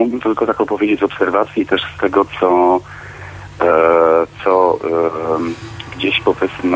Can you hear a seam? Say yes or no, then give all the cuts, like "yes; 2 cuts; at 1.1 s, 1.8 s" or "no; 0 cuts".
no; 0 cuts